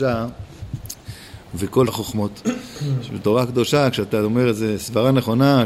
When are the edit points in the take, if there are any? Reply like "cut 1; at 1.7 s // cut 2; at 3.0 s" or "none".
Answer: cut 1; at 1.9 s

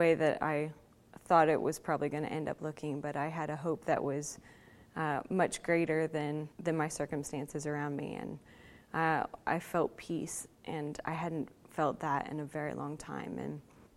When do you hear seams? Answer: cut 1; at 6.5 s // cut 2; at 10.5 s

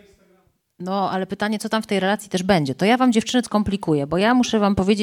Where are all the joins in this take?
cut 1; at 3.4 s

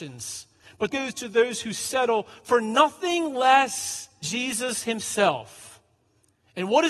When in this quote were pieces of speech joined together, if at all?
cut 1; at 0.9 s // cut 2; at 4.2 s

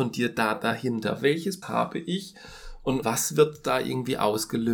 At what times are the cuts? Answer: cut 1; at 1.6 s // cut 2; at 3.0 s

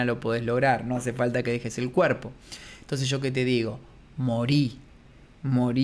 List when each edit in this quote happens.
none

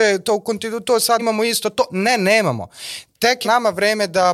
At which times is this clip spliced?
cut 1; at 1.2 s // cut 2; at 3.4 s

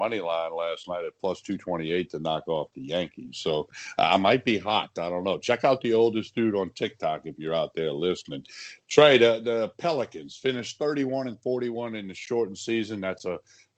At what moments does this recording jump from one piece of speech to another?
none

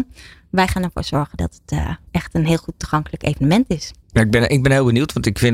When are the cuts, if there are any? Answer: cut 1; at 2.1 s // cut 2; at 4.0 s

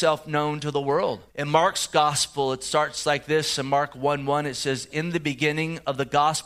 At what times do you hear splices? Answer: cut 1; at 1.3 s

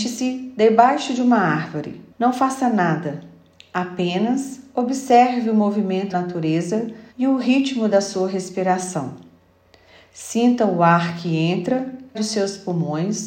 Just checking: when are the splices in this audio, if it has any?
cut 1; at 2.1 s // cut 2; at 6.1 s // cut 3; at 7.1 s // cut 4; at 12.1 s

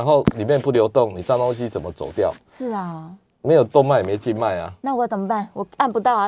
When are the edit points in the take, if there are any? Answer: none

